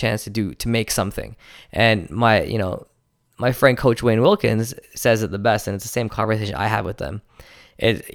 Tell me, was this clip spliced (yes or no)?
no